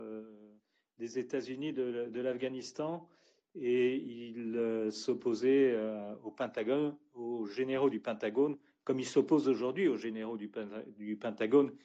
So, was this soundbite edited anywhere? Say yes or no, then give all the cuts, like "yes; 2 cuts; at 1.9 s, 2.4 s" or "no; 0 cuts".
no; 0 cuts